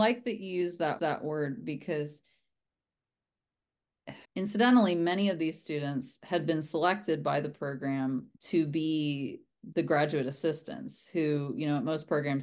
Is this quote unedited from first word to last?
no; 3 cuts; at 1.0 s, 4.2 s, 8.3 s

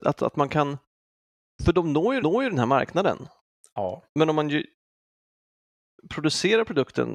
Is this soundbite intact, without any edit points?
no; 1 cut; at 2.2 s

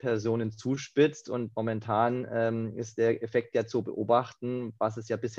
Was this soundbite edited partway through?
no; 0 cuts

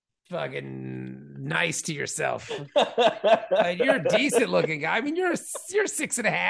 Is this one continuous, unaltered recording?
yes; 0 cuts

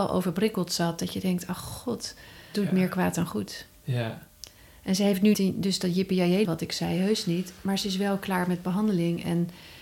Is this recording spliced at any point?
yes; 3 cuts; at 2.5 s, 5.3 s, 6.4 s

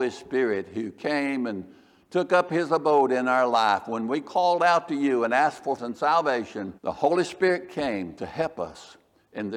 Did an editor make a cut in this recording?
yes; 2 cuts; at 5.8 s, 6.8 s

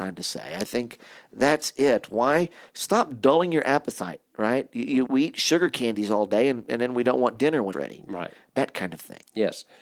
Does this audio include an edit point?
yes; 3 cuts; at 4.3 s, 5.1 s, 7.7 s

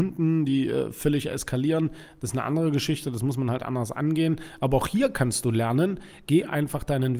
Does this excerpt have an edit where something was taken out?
no; 0 cuts

